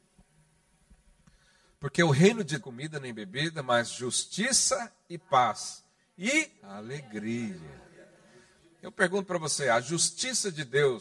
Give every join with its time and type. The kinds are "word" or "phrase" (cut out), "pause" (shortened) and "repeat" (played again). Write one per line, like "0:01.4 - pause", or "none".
0:02.6 - phrase
0:06.6 - pause